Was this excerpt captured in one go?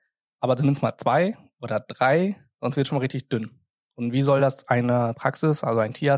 yes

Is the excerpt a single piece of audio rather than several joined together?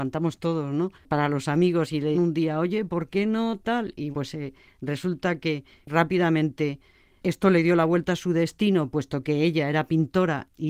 no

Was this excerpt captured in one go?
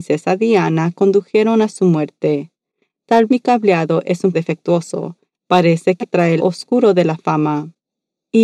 no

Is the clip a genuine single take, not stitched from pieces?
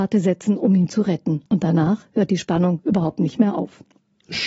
no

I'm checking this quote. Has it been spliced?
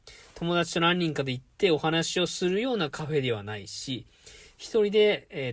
no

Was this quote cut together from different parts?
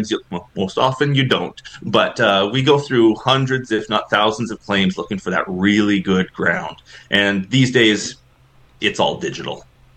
no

